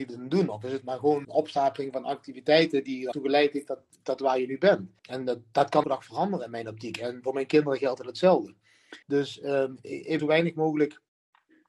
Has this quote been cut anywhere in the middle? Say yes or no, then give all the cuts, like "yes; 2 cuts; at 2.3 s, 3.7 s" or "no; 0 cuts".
yes; 6 cuts; at 1.2 s, 3.1 s, 5.0 s, 5.8 s, 9.0 s, 10.2 s